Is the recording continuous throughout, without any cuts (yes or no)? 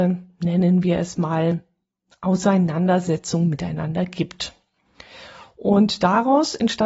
yes